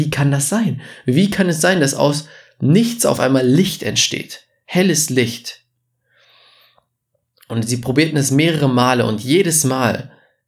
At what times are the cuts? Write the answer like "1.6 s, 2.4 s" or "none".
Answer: none